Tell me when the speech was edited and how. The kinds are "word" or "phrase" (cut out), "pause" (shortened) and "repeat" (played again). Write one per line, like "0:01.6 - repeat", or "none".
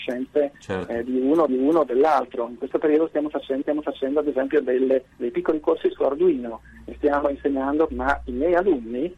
0:01.5 - repeat
0:03.6 - repeat
0:05.1 - pause
0:07.9 - word